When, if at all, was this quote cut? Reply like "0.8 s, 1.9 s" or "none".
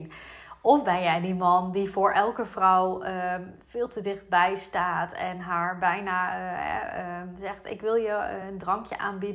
none